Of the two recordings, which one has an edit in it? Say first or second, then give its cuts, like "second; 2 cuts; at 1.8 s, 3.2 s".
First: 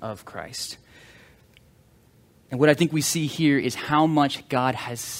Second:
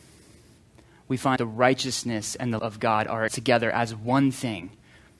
second; 3 cuts; at 1.4 s, 2.6 s, 3.3 s